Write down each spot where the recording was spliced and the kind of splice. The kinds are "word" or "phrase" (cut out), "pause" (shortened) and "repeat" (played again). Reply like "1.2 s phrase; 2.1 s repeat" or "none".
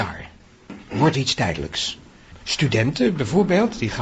1.1 s phrase